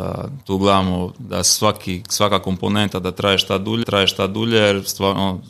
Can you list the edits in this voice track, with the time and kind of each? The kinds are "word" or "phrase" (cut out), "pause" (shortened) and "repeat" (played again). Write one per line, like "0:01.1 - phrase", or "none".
0:03.8 - repeat